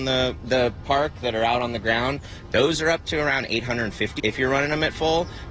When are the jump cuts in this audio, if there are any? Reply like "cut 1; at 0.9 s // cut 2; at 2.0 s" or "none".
cut 1; at 4.2 s